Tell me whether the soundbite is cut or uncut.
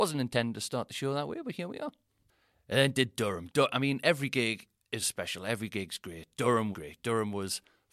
cut